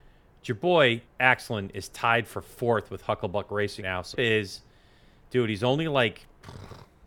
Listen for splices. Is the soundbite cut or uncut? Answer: cut